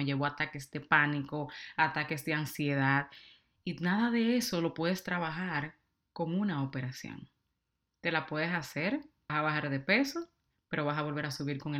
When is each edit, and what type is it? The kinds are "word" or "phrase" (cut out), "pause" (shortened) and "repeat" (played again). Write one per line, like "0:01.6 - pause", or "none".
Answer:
0:09.3 - word